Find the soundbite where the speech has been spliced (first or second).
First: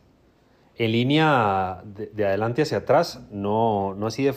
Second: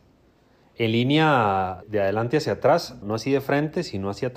second